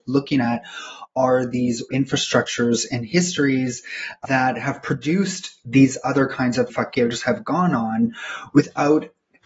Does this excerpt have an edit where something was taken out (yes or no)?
yes